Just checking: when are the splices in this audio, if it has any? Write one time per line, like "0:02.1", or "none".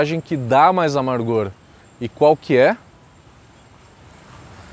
none